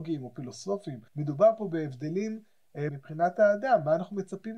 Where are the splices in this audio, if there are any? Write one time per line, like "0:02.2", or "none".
0:01.1
0:02.9